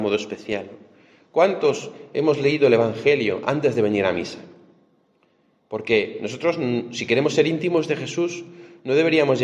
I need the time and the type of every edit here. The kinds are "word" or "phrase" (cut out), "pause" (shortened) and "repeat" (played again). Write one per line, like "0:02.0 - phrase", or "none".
none